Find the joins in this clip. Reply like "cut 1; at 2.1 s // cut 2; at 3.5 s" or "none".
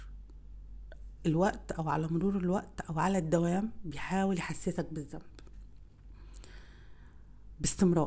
none